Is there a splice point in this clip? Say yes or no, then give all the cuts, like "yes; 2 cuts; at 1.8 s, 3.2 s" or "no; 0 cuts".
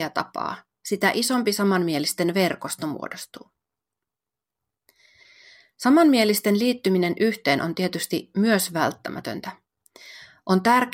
no; 0 cuts